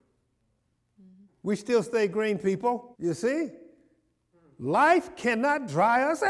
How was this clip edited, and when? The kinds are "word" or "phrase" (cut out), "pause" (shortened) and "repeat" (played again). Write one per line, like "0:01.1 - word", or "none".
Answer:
0:01.3 - pause
0:02.9 - pause